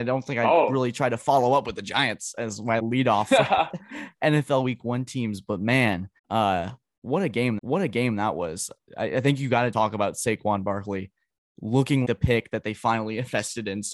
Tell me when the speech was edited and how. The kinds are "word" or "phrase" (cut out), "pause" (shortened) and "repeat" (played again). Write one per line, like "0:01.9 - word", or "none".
0:02.8 - word
0:06.2 - pause
0:07.6 - repeat
0:09.7 - word
0:12.0 - word